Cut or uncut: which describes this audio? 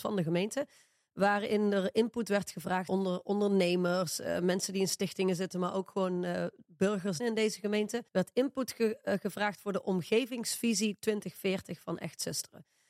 cut